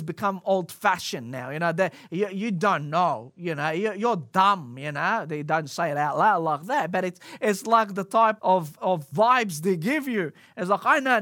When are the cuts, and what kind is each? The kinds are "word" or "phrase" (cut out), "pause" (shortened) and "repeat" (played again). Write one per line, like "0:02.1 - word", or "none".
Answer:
0:08.4 - word